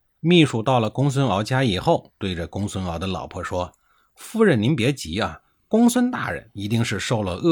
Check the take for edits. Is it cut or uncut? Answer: uncut